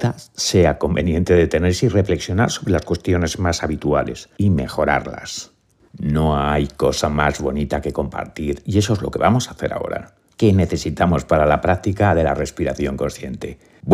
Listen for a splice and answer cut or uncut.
uncut